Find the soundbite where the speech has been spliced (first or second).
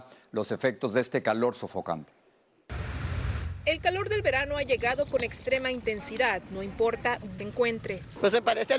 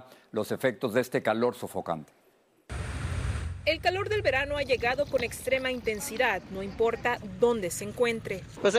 first